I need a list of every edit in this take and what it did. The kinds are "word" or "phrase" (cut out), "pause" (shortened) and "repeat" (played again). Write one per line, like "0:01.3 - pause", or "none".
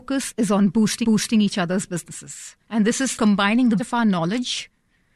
0:01.0 - repeat
0:02.6 - pause
0:03.1 - word
0:03.8 - word